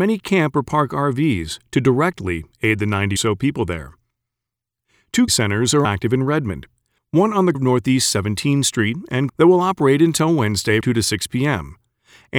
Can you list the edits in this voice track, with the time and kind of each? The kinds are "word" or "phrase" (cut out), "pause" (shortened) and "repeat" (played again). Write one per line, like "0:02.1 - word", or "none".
0:03.2 - word
0:05.3 - word
0:05.8 - word
0:07.5 - word
0:09.3 - word
0:10.8 - word